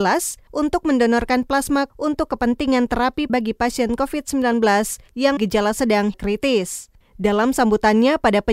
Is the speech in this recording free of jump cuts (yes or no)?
no